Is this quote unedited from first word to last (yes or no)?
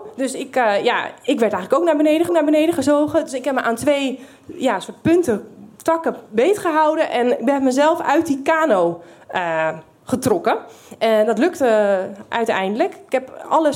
no